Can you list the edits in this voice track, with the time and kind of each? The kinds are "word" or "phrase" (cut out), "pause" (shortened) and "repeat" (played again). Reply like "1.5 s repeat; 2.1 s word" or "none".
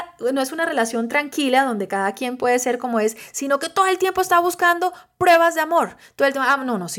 none